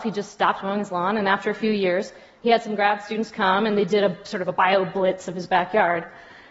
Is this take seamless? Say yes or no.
yes